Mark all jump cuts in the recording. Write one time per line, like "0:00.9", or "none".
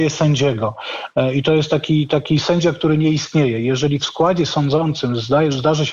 none